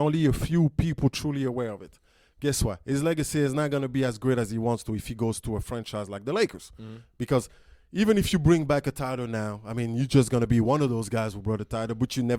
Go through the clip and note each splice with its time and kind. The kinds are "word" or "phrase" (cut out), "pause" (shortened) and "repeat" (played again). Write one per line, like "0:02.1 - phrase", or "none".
none

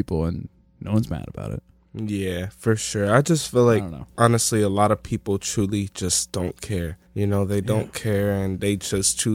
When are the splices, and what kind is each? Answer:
0:07.0 - pause

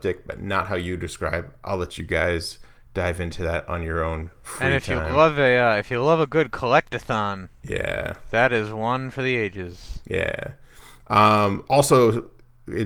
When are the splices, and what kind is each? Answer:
none

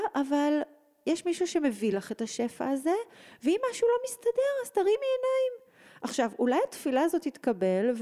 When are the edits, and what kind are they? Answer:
none

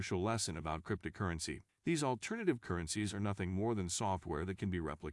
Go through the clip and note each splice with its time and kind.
0:01.7 - pause

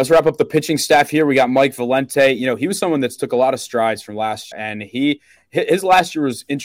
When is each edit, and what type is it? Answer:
0:04.5 - word

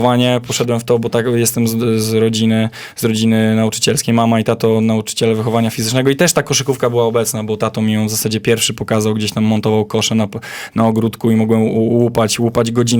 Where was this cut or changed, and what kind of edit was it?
none

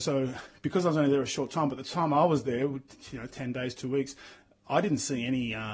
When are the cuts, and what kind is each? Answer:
none

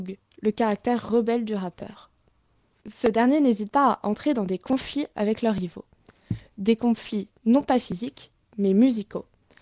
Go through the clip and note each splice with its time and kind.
none

